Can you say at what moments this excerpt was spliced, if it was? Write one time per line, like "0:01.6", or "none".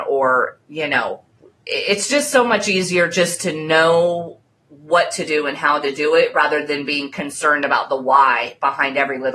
none